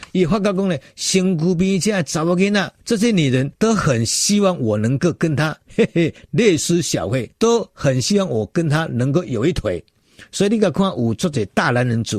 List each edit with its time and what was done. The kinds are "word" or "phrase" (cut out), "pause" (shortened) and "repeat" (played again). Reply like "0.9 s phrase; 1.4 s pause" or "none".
2.8 s pause; 3.5 s pause; 5.6 s pause; 7.3 s pause